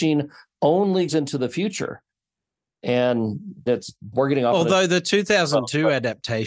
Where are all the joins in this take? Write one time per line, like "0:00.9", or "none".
0:01.1
0:03.7
0:04.1